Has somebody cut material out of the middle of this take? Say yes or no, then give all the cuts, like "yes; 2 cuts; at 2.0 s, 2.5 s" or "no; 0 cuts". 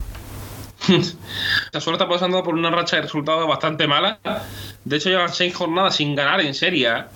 yes; 1 cut; at 1.7 s